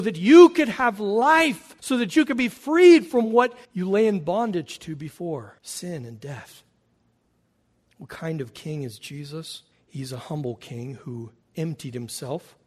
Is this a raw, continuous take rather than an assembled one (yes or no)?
no